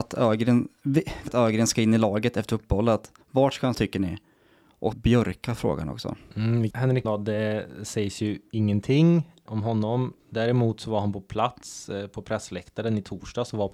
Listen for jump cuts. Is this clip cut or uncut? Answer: cut